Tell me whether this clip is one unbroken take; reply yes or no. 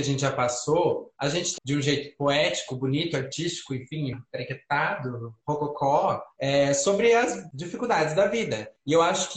no